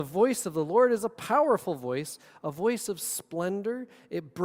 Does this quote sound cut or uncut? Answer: uncut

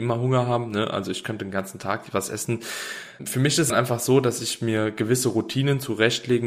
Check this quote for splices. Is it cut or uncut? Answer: cut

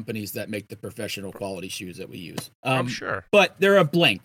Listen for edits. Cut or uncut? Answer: cut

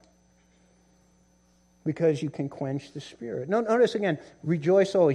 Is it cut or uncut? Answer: uncut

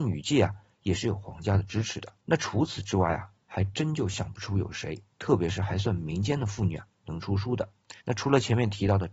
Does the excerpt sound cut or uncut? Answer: cut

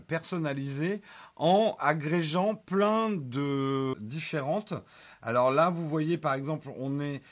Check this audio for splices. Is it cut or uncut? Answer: cut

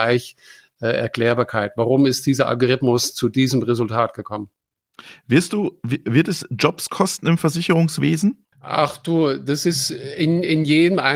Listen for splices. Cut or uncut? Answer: cut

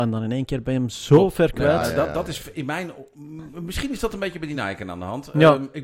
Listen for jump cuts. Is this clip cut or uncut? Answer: uncut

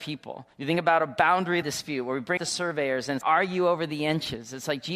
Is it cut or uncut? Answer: cut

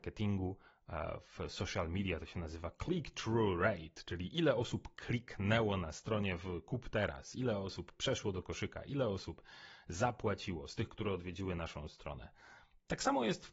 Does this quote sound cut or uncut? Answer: uncut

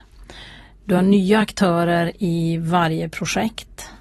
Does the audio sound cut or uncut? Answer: uncut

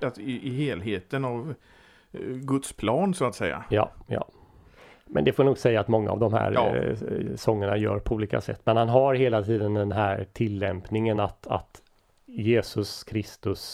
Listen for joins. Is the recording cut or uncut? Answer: uncut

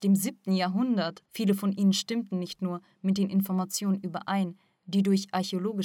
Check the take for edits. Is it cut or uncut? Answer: cut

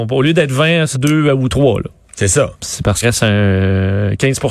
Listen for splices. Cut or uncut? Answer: cut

